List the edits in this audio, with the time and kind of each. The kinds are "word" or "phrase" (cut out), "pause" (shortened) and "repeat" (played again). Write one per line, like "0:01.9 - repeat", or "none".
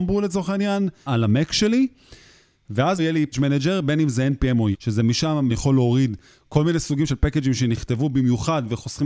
0:01.1 - word
0:03.0 - word
0:03.3 - word
0:04.7 - word
0:05.5 - word
0:07.1 - word